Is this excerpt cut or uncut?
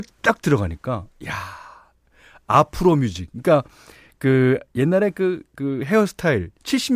uncut